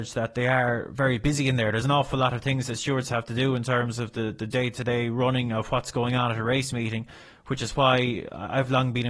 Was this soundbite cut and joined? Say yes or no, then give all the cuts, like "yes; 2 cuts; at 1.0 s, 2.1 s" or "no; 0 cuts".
no; 0 cuts